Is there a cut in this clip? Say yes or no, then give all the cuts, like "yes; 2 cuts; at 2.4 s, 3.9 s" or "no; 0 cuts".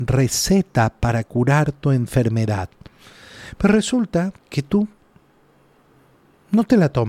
yes; 1 cut; at 4.4 s